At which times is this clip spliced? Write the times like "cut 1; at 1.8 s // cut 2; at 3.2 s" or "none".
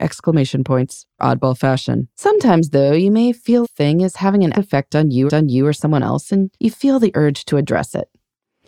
cut 1; at 1.2 s // cut 2; at 2.1 s // cut 3; at 3.6 s // cut 4; at 4.5 s // cut 5; at 5.3 s // cut 6; at 6.5 s